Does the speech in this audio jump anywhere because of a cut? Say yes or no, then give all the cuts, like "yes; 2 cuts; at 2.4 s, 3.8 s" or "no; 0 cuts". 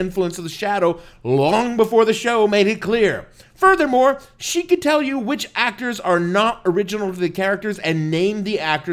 no; 0 cuts